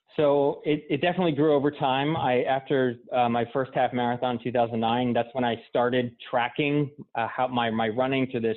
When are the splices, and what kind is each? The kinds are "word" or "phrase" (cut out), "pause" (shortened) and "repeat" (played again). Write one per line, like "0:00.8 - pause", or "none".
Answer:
0:03.0 - pause